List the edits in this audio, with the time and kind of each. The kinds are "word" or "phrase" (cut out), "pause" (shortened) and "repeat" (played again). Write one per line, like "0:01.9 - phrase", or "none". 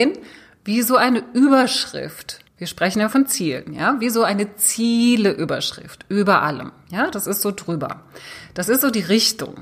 0:02.5 - pause